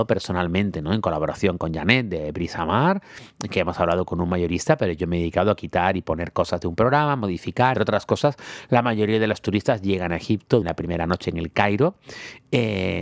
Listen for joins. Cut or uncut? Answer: cut